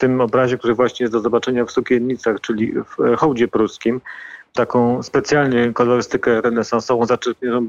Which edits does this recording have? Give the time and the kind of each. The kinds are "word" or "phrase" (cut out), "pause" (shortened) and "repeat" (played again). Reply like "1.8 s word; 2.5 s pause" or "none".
4.5 s word